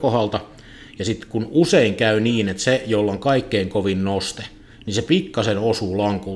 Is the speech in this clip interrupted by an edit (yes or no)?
no